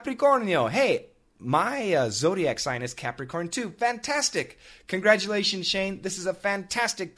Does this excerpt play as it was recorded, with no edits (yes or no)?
yes